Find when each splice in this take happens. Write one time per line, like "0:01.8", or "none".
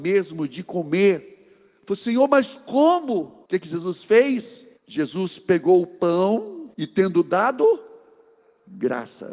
0:03.5
0:04.8
0:06.7